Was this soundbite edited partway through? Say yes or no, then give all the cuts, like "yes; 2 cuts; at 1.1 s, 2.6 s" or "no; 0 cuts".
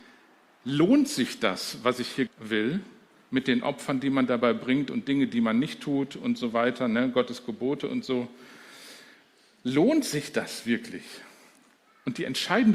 yes; 1 cut; at 2.3 s